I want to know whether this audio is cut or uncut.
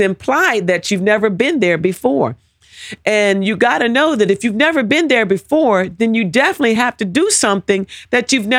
uncut